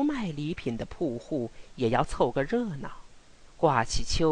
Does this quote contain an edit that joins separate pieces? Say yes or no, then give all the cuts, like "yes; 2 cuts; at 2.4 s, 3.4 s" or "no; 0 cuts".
no; 0 cuts